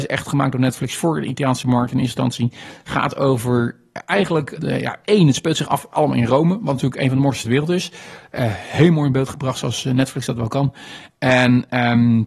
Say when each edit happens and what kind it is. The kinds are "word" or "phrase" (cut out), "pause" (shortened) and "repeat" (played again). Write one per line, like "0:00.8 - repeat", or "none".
0:04.6 - word
0:07.4 - word